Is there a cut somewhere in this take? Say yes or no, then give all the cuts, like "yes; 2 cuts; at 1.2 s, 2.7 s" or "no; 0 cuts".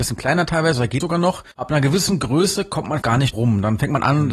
yes; 4 cuts; at 1.0 s, 1.5 s, 3.0 s, 3.3 s